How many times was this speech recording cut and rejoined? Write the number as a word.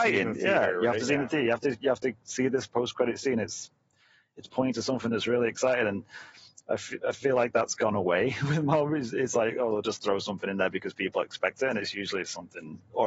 zero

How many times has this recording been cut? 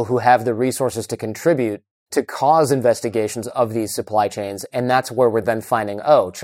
zero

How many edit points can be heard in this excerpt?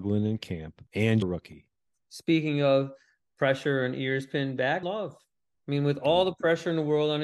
two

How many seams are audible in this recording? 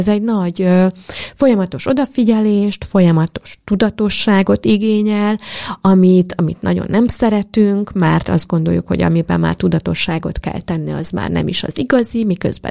zero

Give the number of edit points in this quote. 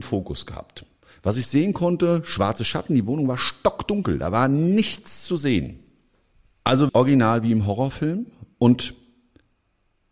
one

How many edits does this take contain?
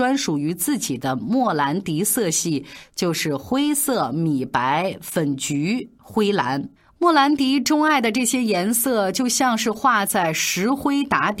one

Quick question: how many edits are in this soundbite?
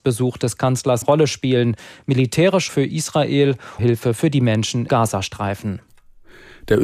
four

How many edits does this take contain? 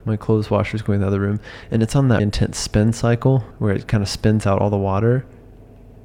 two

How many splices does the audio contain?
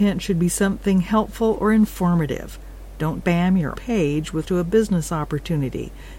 three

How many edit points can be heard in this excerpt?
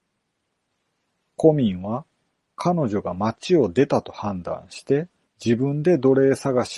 one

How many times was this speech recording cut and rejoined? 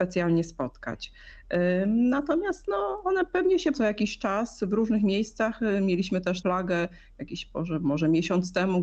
two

